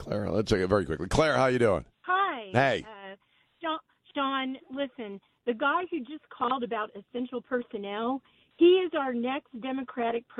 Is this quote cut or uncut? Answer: cut